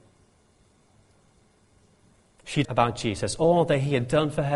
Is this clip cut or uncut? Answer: cut